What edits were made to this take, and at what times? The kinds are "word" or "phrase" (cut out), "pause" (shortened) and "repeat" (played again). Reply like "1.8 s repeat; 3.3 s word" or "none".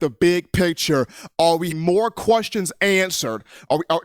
1.7 s word